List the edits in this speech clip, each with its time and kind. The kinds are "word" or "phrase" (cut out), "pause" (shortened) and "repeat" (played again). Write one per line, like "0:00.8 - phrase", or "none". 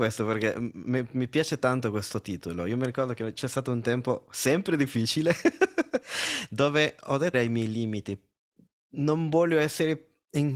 0:07.3 - phrase